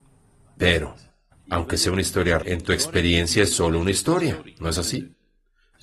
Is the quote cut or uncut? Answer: cut